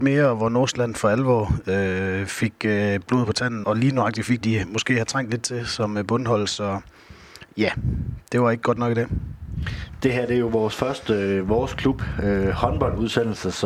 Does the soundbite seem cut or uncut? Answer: cut